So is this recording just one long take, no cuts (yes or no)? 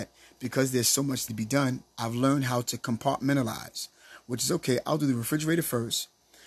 no